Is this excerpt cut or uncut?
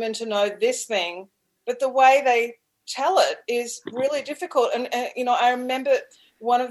uncut